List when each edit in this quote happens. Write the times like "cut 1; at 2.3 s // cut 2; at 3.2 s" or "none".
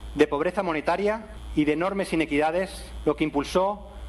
none